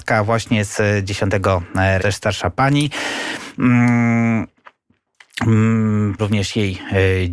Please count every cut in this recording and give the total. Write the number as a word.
two